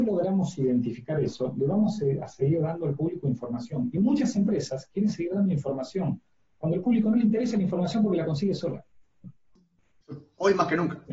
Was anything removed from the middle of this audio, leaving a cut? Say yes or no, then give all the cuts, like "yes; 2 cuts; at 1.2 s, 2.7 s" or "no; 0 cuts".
no; 0 cuts